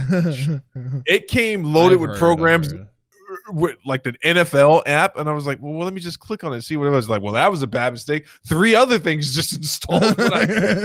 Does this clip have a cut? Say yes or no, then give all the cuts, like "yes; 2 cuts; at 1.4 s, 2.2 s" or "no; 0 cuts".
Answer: no; 0 cuts